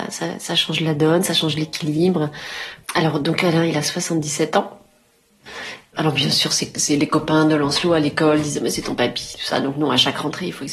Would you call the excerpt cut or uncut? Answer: cut